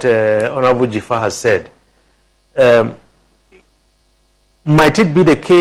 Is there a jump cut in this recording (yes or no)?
no